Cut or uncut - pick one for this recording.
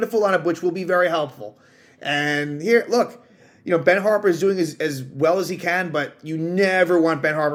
uncut